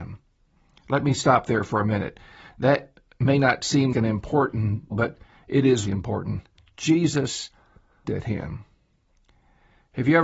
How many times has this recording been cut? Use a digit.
4